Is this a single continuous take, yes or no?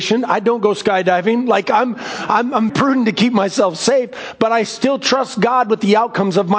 no